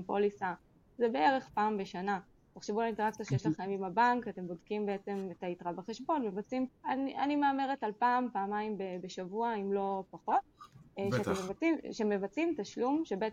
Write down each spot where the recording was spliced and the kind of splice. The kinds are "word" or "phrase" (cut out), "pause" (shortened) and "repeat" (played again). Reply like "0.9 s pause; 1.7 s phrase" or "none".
6.7 s word